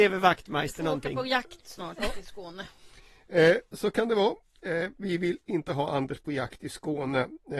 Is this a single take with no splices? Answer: yes; 0 cuts

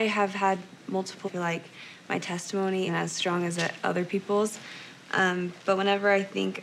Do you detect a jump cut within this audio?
yes; 2 cuts; at 1.2 s, 2.9 s

